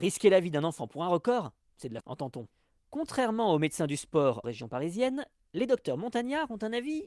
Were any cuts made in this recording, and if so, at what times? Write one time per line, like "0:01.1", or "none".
0:02.0
0:04.4